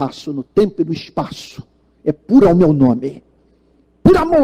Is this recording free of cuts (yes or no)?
no